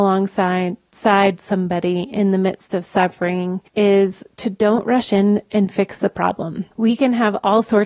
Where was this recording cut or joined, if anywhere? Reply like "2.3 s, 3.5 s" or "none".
3.7 s, 6.7 s